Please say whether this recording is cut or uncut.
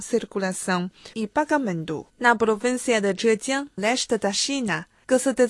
cut